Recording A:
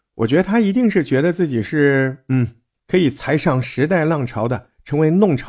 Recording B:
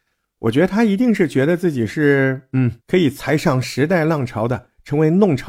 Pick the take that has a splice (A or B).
B